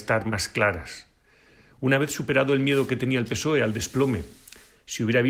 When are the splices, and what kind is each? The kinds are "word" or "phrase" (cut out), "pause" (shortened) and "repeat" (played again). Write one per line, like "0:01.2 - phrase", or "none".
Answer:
none